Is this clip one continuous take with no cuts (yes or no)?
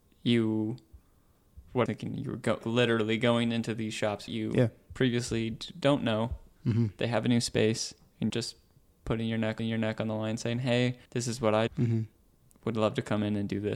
no